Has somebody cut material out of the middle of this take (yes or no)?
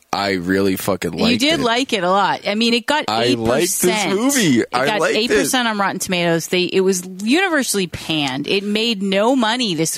no